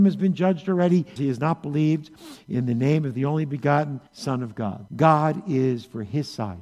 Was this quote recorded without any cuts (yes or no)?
no